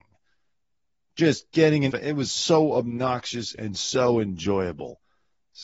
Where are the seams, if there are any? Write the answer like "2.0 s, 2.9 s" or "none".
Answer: 1.5 s, 1.9 s

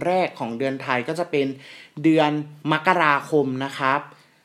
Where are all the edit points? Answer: 2.6 s

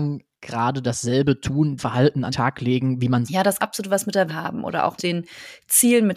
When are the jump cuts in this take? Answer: 1.8 s, 2.3 s, 3.2 s, 3.6 s, 4.3 s, 5.0 s

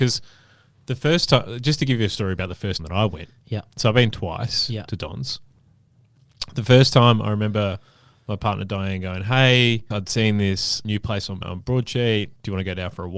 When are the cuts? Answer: 2.8 s

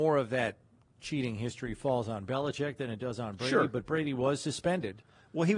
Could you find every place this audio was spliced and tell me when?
none

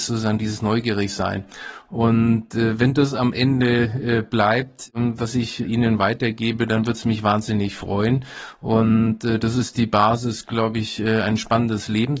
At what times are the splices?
none

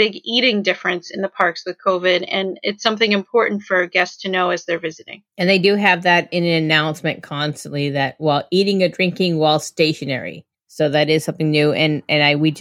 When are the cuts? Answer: 5.3 s

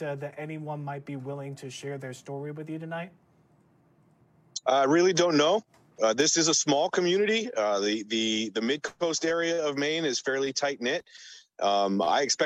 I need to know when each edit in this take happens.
4.6 s

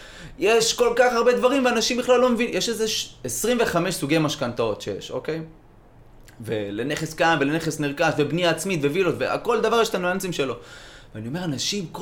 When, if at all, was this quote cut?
none

